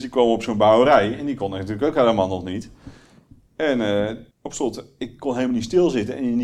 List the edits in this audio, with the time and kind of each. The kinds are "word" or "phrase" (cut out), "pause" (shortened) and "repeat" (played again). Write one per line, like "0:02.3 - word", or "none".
0:04.3 - pause